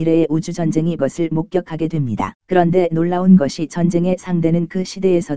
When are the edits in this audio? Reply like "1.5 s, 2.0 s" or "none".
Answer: 1.0 s, 2.4 s